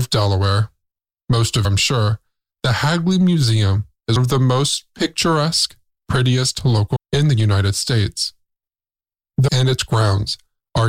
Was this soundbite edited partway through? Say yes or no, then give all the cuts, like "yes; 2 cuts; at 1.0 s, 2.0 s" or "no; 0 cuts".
yes; 4 cuts; at 1.6 s, 4.2 s, 7.0 s, 9.5 s